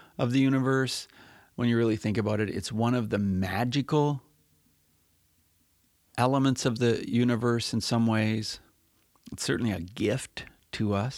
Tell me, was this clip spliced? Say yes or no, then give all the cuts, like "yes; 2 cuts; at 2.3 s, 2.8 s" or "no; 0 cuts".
no; 0 cuts